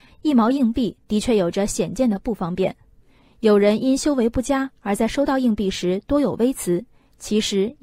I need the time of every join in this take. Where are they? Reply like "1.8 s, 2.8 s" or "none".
none